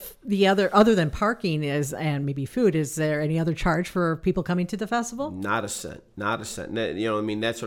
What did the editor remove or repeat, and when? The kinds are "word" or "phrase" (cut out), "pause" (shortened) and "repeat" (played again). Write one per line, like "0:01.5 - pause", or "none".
none